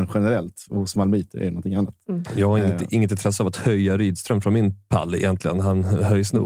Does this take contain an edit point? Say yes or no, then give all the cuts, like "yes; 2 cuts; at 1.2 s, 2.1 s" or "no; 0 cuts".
no; 0 cuts